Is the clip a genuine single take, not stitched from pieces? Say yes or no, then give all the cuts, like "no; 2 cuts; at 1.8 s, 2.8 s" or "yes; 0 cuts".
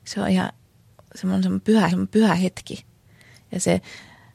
no; 1 cut; at 1.9 s